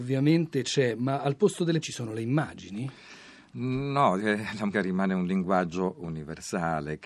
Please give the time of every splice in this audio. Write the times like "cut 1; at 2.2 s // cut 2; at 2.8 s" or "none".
cut 1; at 1.8 s // cut 2; at 4.2 s // cut 3; at 4.7 s